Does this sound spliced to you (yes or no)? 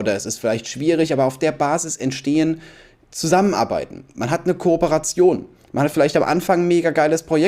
no